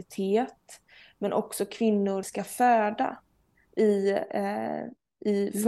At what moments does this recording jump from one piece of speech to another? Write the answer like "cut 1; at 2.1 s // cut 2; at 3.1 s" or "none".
cut 1; at 2.2 s